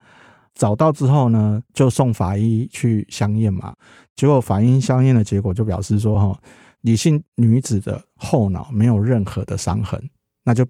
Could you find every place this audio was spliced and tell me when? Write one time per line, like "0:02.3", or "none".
none